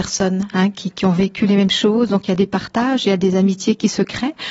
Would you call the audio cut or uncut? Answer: uncut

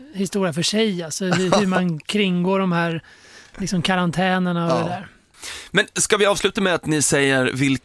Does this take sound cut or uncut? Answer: uncut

